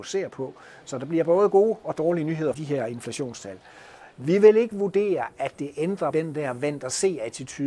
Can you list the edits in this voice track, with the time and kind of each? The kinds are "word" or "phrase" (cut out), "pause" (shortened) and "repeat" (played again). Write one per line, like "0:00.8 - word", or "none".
0:02.5 - phrase
0:06.1 - word